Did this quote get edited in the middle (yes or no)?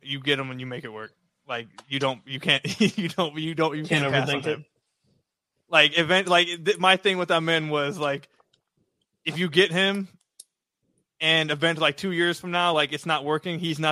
no